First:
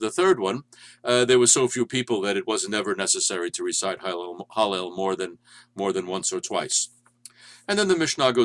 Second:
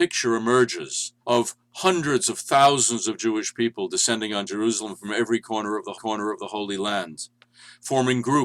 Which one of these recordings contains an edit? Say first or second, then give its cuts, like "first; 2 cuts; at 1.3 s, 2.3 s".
second; 2 cuts; at 1.2 s, 5.9 s